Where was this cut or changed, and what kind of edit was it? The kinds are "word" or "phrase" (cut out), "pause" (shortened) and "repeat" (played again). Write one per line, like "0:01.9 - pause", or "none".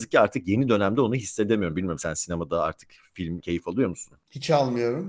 0:03.4 - word

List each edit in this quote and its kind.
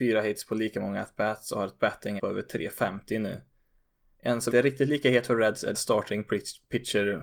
0:02.2 - word
0:04.5 - word
0:05.7 - word

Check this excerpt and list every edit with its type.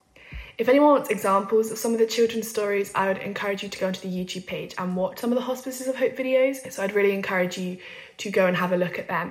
none

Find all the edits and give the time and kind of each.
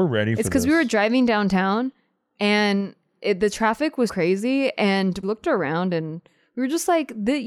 0:04.1 - word
0:05.2 - word

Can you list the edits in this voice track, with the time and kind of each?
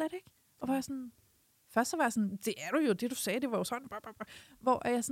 none

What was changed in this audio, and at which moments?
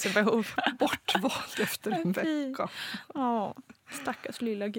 0:03.8 - pause

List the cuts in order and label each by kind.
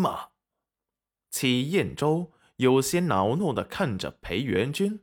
none

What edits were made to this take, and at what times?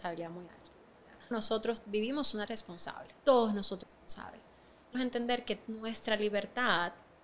0:01.3 - word
0:02.4 - word
0:03.2 - pause
0:03.8 - phrase
0:04.9 - phrase

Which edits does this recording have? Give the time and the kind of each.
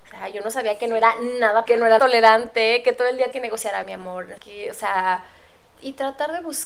0:01.7 - word
0:02.0 - word
0:03.3 - word
0:03.8 - word
0:04.4 - word
0:05.7 - word

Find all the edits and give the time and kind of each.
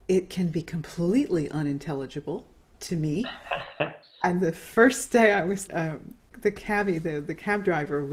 0:05.7 - word
0:06.3 - word

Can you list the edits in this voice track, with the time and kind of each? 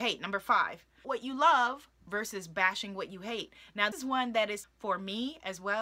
0:01.0 - word
0:03.9 - word
0:04.6 - word

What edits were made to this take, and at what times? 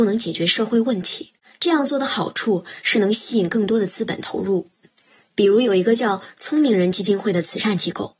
0:01.4 - pause

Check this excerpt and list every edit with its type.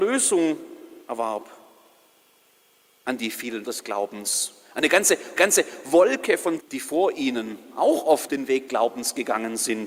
0:01.0 - pause
0:03.6 - word
0:05.4 - repeat
0:06.6 - word
0:08.3 - phrase
0:08.7 - word

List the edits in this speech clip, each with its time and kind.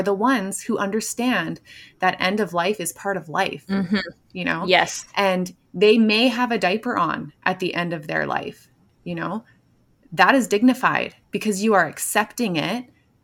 0:11.2 - pause

